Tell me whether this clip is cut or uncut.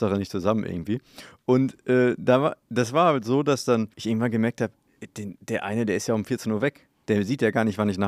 cut